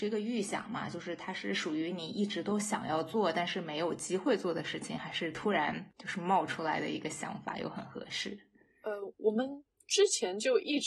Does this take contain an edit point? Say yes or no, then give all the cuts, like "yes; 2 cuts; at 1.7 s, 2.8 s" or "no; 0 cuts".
no; 0 cuts